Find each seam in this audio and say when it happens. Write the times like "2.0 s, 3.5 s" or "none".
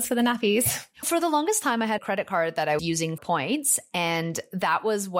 1.0 s, 2.0 s, 2.8 s, 3.2 s